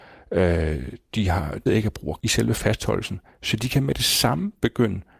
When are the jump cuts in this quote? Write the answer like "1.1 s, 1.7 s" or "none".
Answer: 1.7 s, 2.2 s